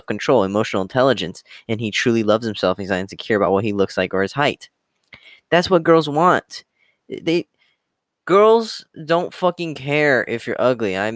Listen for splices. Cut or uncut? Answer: uncut